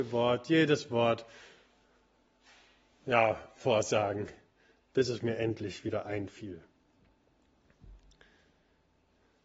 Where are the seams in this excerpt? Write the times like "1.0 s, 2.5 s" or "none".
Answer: none